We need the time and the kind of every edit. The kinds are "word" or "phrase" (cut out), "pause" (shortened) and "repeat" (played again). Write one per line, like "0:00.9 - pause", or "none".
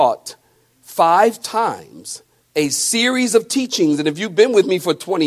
0:02.4 - pause